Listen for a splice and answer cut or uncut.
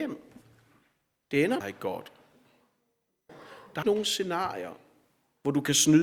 cut